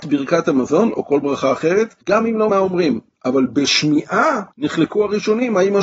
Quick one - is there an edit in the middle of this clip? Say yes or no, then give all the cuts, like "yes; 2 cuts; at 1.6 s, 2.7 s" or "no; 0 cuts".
yes; 3 cuts; at 2.0 s, 2.5 s, 4.5 s